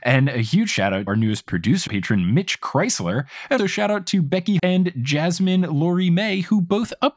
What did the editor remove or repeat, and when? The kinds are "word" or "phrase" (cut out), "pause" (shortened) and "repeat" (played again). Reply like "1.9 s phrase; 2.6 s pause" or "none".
1.1 s word; 1.9 s word; 3.6 s word; 4.6 s word